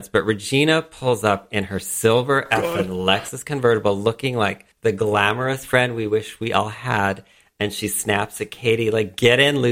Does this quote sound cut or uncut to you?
cut